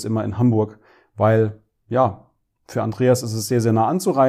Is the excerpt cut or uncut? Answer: uncut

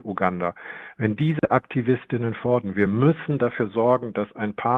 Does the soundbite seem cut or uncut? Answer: uncut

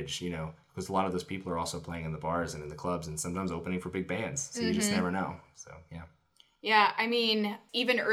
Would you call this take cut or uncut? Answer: uncut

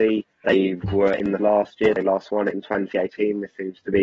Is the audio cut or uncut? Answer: cut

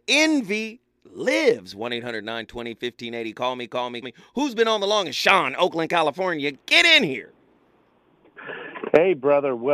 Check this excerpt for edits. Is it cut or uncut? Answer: cut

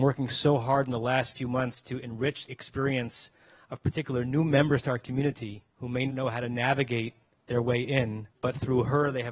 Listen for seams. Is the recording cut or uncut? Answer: cut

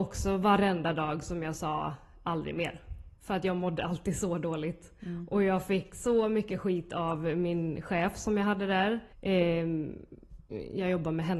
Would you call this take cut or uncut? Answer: cut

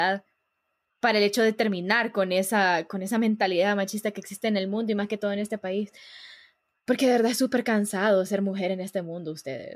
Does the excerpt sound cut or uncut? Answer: uncut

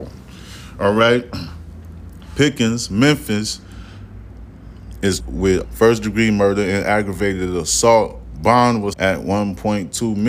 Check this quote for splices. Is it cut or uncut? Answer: cut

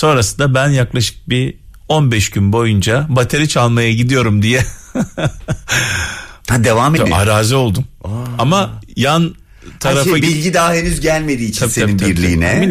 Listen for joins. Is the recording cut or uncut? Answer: cut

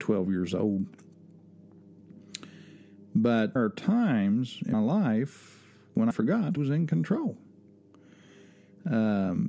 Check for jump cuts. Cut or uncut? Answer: cut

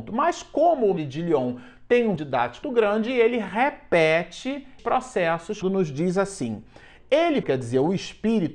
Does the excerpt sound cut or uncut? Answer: cut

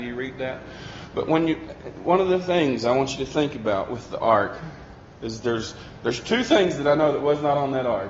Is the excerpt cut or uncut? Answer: uncut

